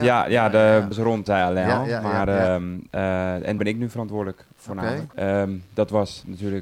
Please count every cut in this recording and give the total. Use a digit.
3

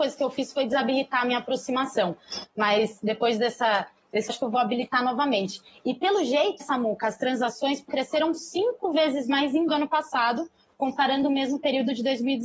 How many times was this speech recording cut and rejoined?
4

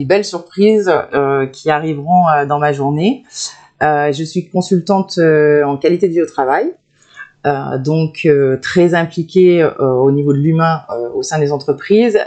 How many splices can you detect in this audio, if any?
0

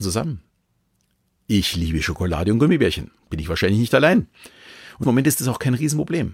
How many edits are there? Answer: 2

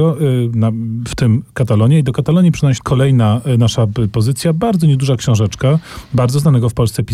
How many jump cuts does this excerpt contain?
1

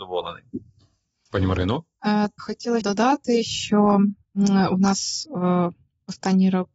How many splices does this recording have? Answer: 2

